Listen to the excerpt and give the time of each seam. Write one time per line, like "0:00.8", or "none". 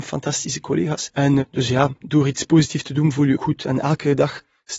0:03.4